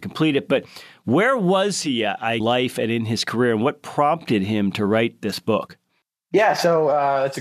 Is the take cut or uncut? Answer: cut